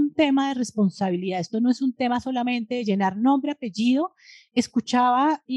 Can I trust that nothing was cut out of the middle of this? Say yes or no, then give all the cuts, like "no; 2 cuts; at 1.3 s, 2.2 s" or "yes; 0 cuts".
yes; 0 cuts